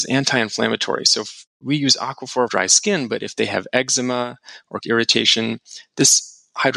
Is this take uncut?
no; 2 cuts; at 2.5 s, 4.8 s

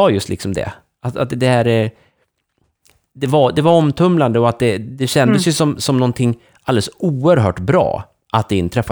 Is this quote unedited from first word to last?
yes; 0 cuts

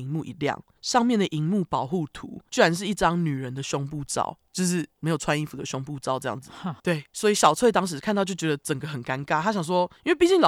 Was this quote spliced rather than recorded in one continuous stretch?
yes; 2 cuts; at 4.5 s, 6.8 s

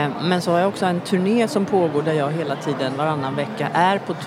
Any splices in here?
no; 0 cuts

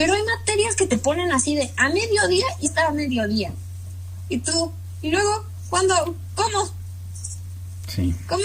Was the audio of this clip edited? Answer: yes; 1 cut; at 2.6 s

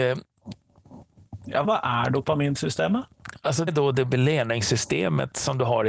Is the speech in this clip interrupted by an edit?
yes; 2 cuts; at 1.6 s, 3.7 s

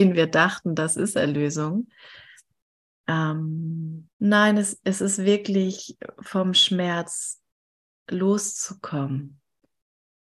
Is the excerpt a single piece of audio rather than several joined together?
no; 1 cut; at 4.1 s

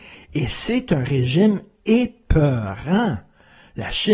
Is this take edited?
no; 0 cuts

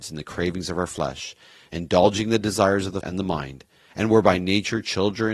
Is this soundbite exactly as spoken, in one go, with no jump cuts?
no; 1 cut; at 3.0 s

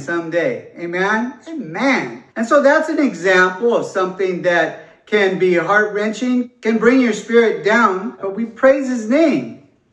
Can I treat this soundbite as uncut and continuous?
no; 1 cut; at 2.3 s

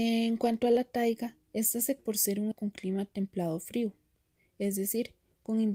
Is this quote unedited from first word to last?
no; 3 cuts; at 1.5 s, 2.0 s, 2.5 s

